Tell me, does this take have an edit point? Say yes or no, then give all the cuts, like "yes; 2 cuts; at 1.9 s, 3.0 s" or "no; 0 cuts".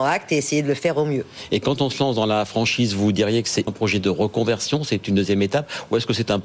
yes; 1 cut; at 3.7 s